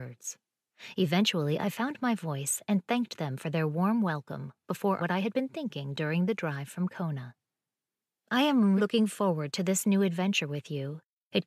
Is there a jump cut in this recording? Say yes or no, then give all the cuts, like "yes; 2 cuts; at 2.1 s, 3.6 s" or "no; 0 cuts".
yes; 2 cuts; at 5.0 s, 8.8 s